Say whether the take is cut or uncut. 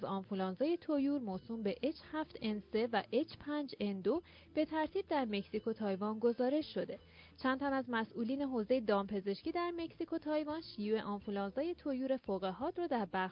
uncut